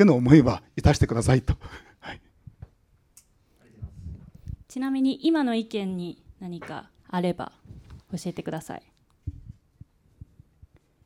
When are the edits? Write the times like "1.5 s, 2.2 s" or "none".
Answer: 4.6 s, 7.0 s, 8.0 s